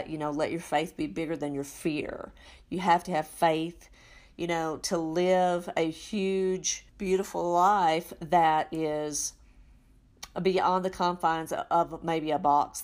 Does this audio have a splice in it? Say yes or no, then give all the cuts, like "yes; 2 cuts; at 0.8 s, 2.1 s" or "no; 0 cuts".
yes; 1 cut; at 6.9 s